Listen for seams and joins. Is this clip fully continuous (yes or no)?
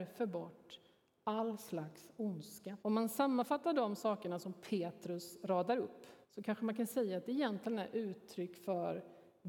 no